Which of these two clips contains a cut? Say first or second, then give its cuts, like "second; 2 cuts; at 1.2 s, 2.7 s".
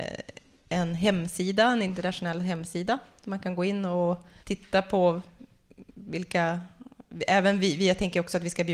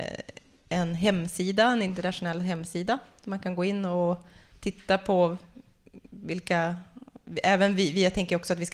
first; 1 cut; at 4.4 s